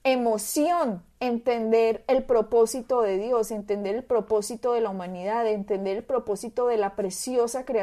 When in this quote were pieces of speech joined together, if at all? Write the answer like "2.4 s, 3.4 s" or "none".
none